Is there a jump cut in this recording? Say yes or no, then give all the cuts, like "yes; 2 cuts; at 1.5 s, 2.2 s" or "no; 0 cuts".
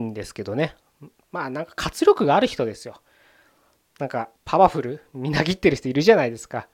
yes; 1 cut; at 4.4 s